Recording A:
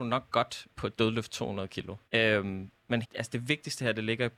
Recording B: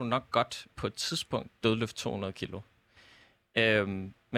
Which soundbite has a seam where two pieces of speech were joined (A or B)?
A